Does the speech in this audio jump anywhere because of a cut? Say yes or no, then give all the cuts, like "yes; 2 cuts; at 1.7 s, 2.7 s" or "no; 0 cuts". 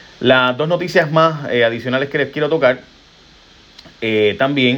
no; 0 cuts